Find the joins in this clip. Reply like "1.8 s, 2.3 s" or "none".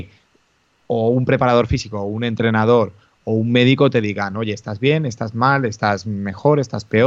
none